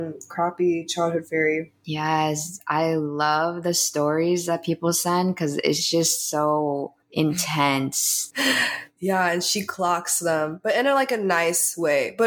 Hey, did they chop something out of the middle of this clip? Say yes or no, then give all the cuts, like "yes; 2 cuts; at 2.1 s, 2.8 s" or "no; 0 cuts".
no; 0 cuts